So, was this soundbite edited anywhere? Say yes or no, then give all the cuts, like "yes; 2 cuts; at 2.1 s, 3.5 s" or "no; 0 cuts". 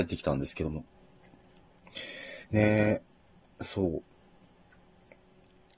yes; 2 cuts; at 2.4 s, 3.4 s